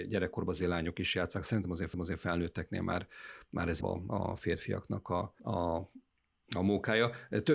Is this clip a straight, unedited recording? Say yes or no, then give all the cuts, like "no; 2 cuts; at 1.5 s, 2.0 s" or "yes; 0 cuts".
no; 3 cuts; at 1.9 s, 3.8 s, 5.4 s